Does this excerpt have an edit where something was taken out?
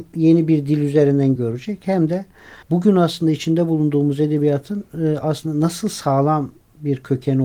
yes; 2 cuts; at 1.4 s, 2.6 s

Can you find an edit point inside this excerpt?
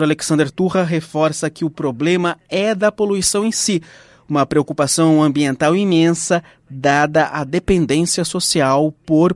no; 0 cuts

